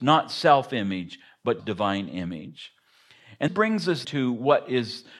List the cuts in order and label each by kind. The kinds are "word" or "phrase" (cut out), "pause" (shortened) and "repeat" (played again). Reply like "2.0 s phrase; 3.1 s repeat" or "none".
1.6 s word; 3.5 s word; 4.0 s word

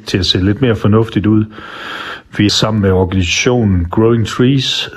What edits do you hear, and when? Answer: 2.5 s phrase

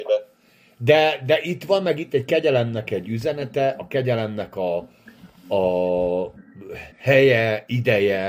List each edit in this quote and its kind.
6.9 s pause

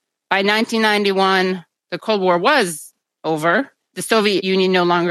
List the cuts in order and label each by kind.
none

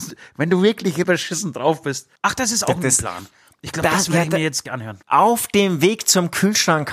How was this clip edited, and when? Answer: 1.0 s word; 2.2 s pause; 4.7 s word; 5.0 s pause

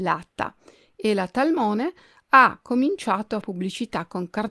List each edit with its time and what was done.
3.4 s word

